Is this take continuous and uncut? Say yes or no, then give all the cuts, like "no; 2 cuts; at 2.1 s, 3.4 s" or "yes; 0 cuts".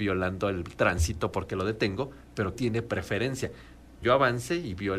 no; 2 cuts; at 2.5 s, 4.0 s